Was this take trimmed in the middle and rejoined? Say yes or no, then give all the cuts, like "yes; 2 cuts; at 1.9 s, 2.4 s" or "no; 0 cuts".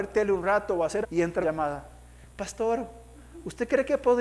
yes; 2 cuts; at 1.0 s, 1.4 s